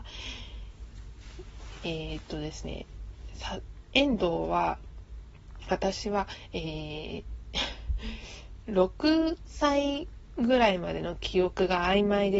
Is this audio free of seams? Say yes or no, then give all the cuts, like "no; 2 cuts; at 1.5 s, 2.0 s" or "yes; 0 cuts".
yes; 0 cuts